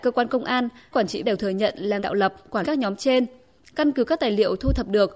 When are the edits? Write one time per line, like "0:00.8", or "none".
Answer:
0:00.9
0:01.2
0:02.0
0:02.6